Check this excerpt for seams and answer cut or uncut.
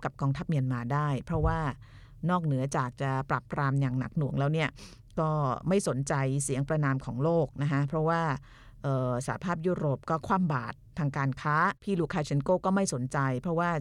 cut